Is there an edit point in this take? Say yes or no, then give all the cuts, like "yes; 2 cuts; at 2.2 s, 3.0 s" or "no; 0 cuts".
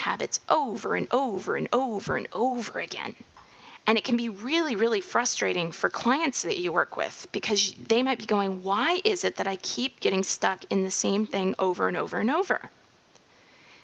no; 0 cuts